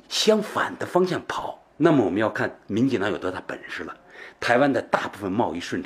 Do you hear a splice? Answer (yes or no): yes